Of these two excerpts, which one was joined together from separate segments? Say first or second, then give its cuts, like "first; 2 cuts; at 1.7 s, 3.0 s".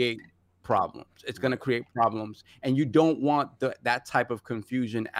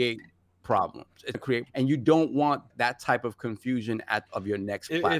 second; 4 cuts; at 1.3 s, 1.7 s, 2.7 s, 4.3 s